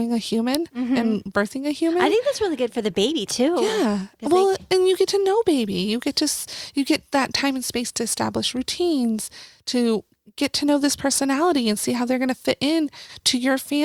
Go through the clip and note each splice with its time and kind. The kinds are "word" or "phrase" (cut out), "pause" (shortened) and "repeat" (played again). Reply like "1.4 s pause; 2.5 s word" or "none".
none